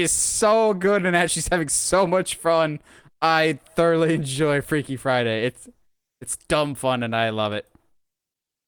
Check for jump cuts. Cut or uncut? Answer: uncut